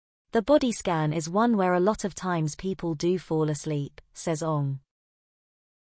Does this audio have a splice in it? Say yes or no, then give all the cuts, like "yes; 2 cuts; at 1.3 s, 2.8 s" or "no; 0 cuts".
no; 0 cuts